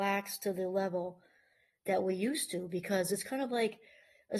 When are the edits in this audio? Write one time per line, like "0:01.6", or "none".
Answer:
none